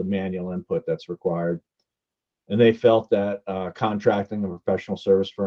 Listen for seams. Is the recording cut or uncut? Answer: uncut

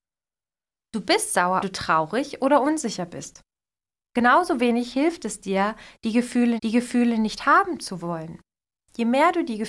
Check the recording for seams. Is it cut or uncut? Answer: cut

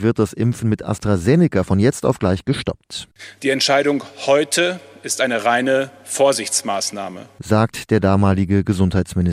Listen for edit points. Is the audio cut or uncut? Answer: uncut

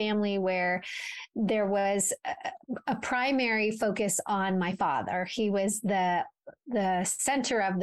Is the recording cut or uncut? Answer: uncut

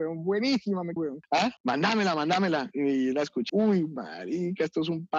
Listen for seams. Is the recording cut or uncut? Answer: cut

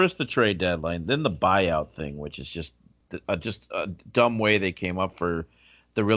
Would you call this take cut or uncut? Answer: uncut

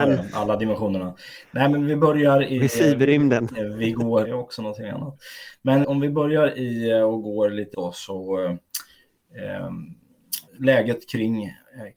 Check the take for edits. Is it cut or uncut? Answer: cut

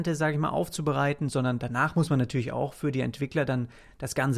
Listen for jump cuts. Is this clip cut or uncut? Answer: uncut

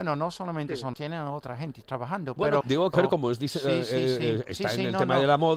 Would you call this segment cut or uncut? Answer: cut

